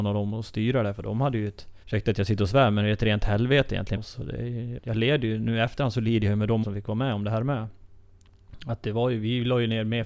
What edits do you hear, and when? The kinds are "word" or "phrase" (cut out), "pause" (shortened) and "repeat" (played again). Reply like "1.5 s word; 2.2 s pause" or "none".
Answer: 1.8 s pause; 4.0 s word; 4.8 s word; 6.6 s word